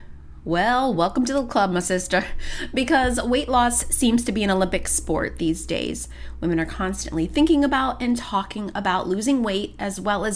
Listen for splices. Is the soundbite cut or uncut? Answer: uncut